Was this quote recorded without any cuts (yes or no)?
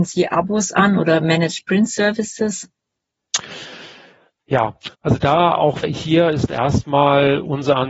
no